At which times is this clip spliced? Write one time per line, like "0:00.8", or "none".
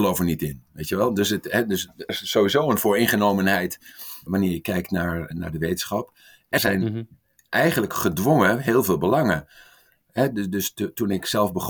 0:02.1
0:04.3
0:05.3
0:06.6